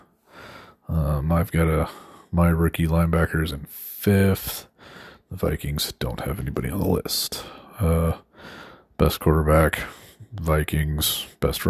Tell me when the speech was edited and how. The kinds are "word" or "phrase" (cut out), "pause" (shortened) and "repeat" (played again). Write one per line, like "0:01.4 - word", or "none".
none